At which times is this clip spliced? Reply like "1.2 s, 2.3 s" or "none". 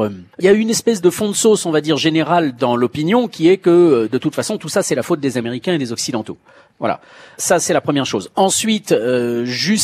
none